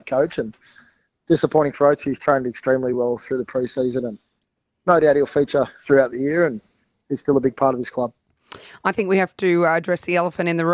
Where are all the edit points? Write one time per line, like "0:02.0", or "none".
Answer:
none

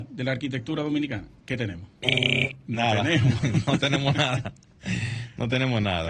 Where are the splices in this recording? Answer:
0:01.4

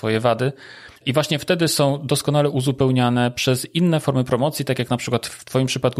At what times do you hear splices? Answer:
0:01.0

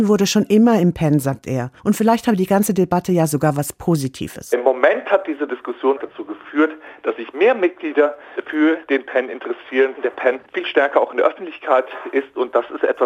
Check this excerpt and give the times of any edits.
0:01.8

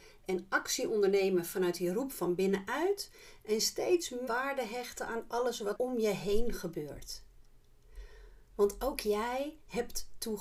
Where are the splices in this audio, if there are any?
0:04.3
0:05.8

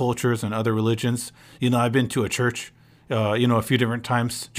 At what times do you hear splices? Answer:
none

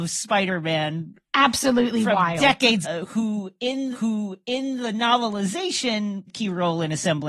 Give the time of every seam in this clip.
0:02.8
0:03.9
0:06.3

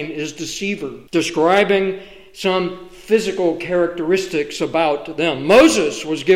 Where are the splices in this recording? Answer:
0:01.1

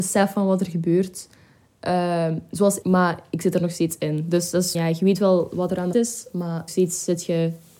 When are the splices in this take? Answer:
0:02.8
0:04.7
0:05.9
0:06.7

